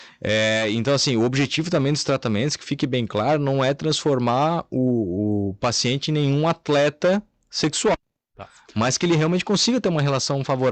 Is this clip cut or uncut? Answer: uncut